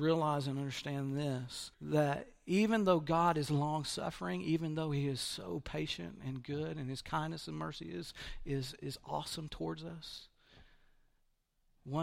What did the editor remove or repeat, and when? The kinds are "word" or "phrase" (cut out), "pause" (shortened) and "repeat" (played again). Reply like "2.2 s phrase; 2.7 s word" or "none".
1.7 s pause